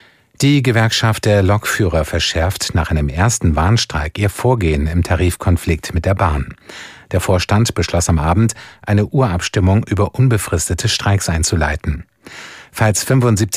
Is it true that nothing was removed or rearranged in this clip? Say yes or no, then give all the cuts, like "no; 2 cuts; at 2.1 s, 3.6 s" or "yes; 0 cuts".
yes; 0 cuts